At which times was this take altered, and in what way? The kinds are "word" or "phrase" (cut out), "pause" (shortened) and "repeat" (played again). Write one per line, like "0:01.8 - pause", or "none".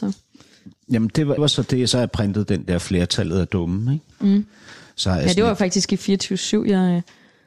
0:01.4 - word